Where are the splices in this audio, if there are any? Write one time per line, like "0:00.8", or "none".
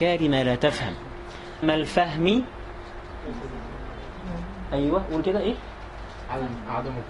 0:01.6
0:05.2